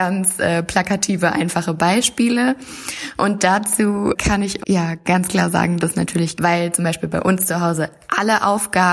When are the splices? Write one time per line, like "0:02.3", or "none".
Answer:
0:04.6
0:05.8
0:06.4